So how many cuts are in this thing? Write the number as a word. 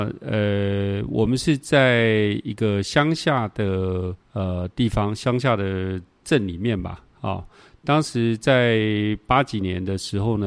one